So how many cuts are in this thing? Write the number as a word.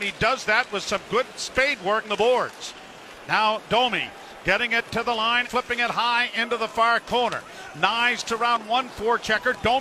three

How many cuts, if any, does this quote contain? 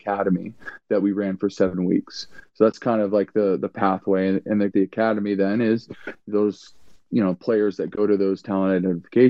one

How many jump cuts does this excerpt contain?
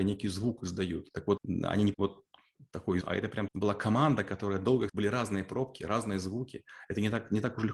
five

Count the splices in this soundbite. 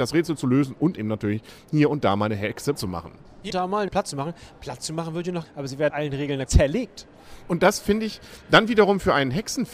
seven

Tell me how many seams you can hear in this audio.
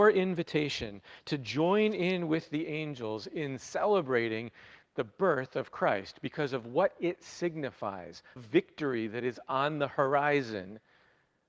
one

